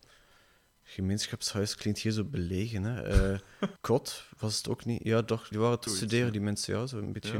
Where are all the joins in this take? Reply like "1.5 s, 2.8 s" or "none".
3.8 s, 5.5 s, 5.9 s